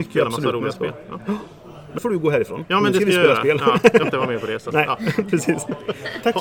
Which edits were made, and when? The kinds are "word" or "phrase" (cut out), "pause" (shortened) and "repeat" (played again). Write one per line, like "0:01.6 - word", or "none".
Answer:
0:02.0 - word
0:04.0 - word